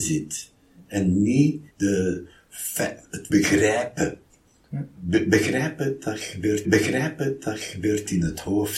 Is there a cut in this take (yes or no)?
yes